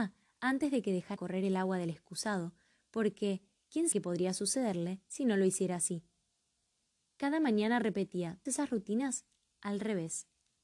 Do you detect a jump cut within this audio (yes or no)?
yes